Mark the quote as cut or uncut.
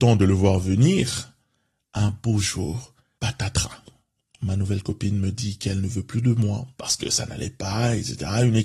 uncut